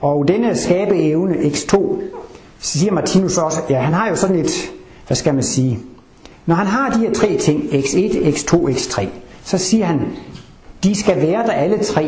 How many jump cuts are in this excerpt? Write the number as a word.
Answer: zero